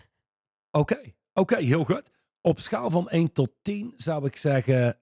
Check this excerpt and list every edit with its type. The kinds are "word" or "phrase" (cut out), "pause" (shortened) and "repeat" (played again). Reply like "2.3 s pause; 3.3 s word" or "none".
none